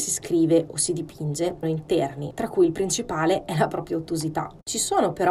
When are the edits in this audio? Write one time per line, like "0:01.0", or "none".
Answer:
0:01.6

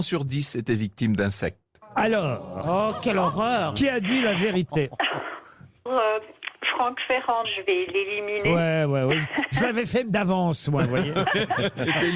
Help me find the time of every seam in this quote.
0:05.9
0:07.4
0:10.0

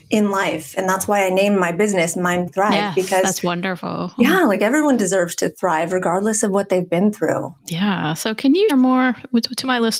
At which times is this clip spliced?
0:02.5
0:07.6
0:08.7

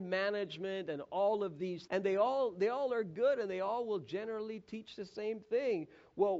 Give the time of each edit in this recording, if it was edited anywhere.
0:01.9

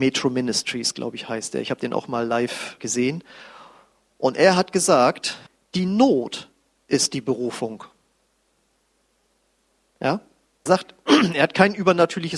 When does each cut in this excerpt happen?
0:02.8
0:05.5
0:10.7

